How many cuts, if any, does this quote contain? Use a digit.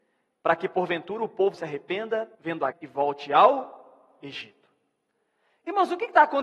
3